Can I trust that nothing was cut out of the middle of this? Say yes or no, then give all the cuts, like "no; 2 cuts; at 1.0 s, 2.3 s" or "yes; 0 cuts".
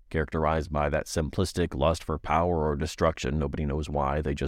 yes; 0 cuts